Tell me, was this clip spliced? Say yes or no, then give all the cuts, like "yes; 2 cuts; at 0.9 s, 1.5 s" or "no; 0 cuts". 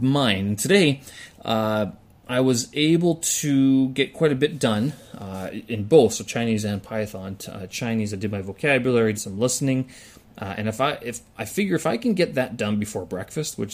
yes; 1 cut; at 9.1 s